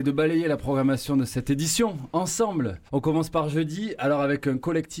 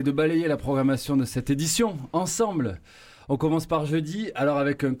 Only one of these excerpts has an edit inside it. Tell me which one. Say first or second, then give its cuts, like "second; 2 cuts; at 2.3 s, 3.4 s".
first; 1 cut; at 2.9 s